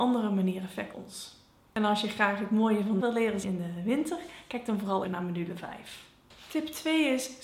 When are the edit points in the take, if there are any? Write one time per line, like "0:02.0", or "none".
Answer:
0:00.9
0:03.0
0:03.4
0:05.0